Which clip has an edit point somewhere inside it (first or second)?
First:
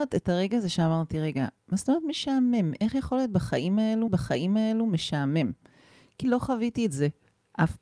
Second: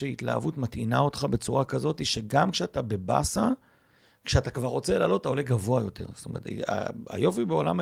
first